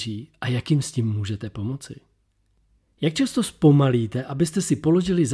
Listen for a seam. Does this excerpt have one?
no; 0 cuts

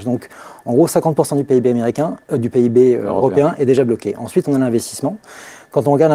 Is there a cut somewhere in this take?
no; 0 cuts

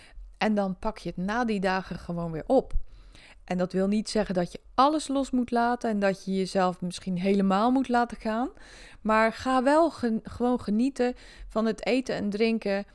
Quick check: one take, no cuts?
yes; 0 cuts

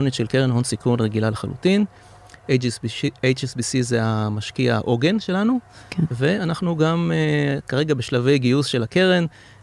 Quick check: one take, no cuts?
yes; 0 cuts

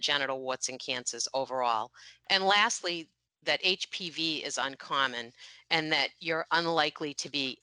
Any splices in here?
no; 0 cuts

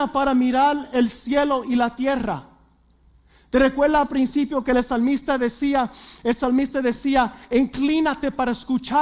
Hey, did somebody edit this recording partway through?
no; 0 cuts

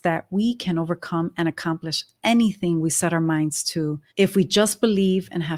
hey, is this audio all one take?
no; 1 cut; at 4.1 s

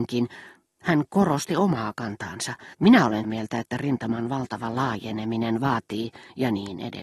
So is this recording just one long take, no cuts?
no; 2 cuts; at 2.7 s, 3.2 s

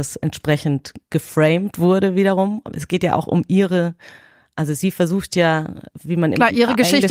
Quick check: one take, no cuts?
yes; 0 cuts

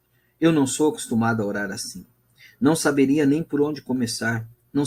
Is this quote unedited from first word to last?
yes; 0 cuts

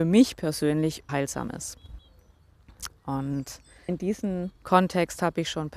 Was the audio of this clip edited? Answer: yes; 3 cuts; at 1.1 s, 3.9 s, 4.6 s

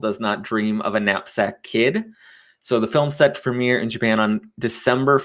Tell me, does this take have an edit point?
no; 0 cuts

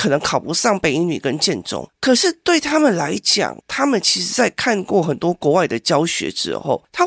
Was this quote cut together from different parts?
yes; 1 cut; at 3.6 s

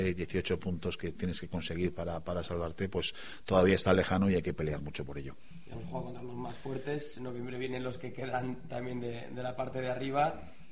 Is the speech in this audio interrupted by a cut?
no; 0 cuts

